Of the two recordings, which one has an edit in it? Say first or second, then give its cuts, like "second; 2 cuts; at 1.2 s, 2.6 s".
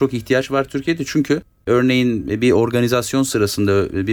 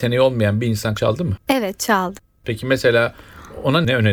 second; 2 cuts; at 1.0 s, 1.4 s